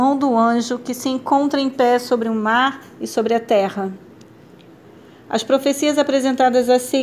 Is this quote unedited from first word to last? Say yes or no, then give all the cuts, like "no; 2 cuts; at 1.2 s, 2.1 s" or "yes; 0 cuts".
yes; 0 cuts